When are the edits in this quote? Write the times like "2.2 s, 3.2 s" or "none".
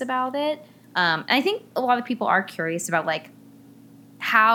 none